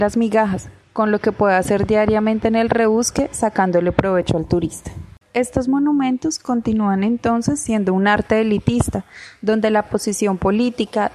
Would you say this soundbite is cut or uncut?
cut